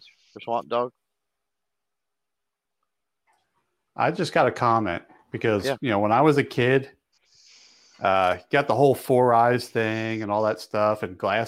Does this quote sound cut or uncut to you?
uncut